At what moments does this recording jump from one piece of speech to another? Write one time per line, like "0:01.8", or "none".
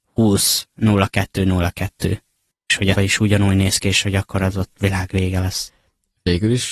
0:02.5
0:02.9